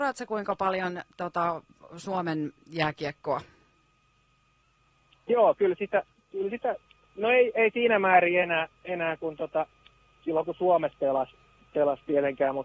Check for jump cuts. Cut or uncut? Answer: uncut